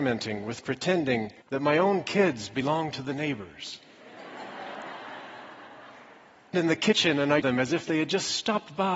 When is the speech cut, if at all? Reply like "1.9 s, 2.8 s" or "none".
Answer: 1.4 s, 6.5 s, 7.4 s